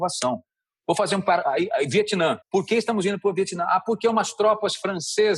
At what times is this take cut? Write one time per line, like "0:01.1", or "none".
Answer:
0:02.4